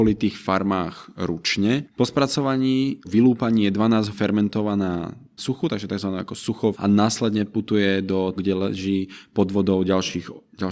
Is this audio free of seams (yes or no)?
no